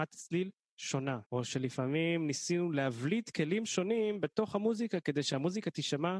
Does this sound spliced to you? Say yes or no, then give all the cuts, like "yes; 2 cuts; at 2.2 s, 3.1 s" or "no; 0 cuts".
yes; 1 cut; at 1.3 s